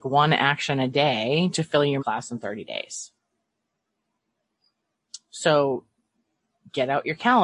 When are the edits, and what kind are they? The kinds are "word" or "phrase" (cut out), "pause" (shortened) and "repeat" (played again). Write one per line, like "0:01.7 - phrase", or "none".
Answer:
0:02.0 - word